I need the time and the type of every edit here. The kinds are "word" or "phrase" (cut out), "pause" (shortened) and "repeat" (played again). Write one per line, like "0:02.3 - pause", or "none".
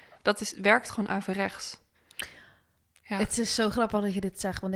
none